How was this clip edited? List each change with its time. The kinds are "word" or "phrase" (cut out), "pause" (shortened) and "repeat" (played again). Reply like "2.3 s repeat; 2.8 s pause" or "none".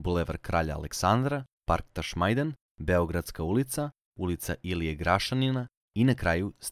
none